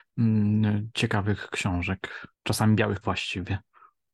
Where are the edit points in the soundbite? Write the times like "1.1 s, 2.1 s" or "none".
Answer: 2.3 s, 3.0 s